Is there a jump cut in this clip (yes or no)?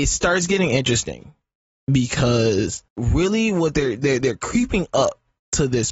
yes